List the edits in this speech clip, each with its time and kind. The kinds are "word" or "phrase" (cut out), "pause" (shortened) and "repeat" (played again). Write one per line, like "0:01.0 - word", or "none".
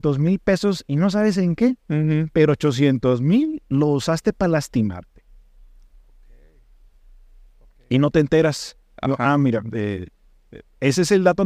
none